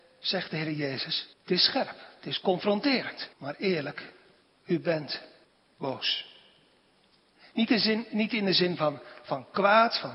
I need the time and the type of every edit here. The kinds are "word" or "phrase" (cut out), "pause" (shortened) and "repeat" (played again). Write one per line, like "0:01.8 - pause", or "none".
0:01.3 - pause
0:03.3 - pause
0:04.4 - pause
0:05.4 - pause